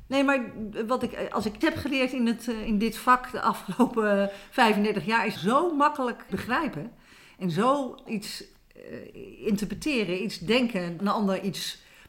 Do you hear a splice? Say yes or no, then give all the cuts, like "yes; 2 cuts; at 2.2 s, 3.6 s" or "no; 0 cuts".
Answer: yes; 6 cuts; at 1.6 s, 2.7 s, 5.3 s, 6.3 s, 8.1 s, 11.0 s